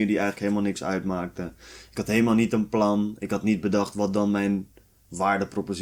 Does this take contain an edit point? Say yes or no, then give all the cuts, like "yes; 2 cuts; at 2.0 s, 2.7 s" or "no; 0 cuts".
no; 0 cuts